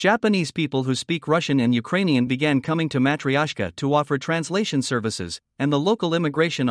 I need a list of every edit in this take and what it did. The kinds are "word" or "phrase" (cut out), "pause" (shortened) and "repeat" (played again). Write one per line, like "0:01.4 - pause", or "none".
none